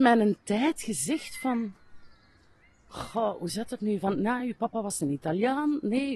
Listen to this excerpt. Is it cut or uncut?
uncut